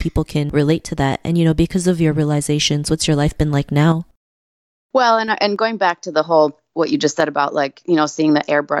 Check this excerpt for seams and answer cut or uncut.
uncut